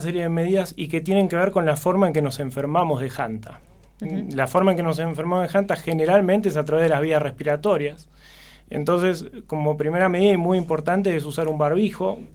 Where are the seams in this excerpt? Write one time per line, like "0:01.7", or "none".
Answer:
none